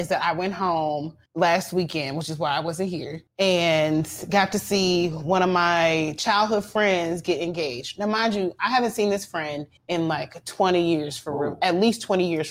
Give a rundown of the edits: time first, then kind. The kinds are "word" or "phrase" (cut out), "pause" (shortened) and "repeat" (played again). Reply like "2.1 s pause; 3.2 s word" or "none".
1.3 s pause; 3.3 s pause; 9.8 s pause